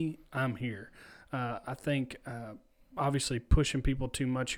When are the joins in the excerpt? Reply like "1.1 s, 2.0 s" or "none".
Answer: none